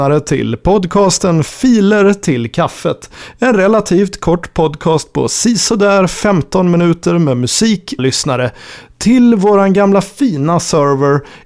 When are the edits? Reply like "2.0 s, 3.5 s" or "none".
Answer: 8.0 s